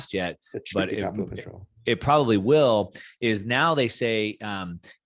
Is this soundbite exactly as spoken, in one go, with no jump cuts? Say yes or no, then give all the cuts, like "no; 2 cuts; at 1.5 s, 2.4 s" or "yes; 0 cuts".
yes; 0 cuts